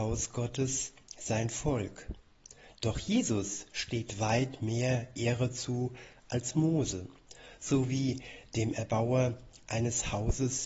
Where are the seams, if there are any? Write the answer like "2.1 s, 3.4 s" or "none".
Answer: none